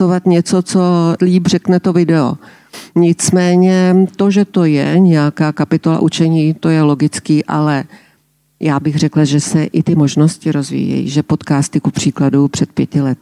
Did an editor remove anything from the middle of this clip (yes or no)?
yes